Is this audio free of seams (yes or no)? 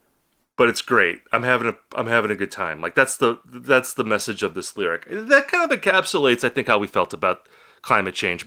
yes